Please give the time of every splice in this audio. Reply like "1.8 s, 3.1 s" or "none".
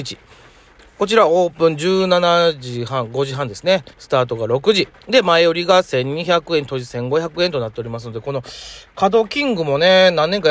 3.9 s, 5.0 s